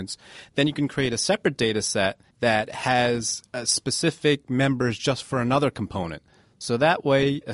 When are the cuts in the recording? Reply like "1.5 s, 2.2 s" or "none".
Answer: 2.3 s